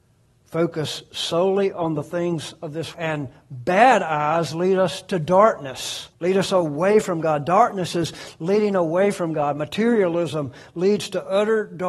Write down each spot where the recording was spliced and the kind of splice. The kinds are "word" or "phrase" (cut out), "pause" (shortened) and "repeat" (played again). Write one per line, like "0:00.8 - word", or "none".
0:02.9 - word
0:06.1 - pause